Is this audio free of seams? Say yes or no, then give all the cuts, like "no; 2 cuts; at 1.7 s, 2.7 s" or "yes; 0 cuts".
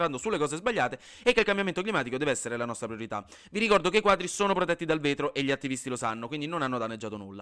yes; 0 cuts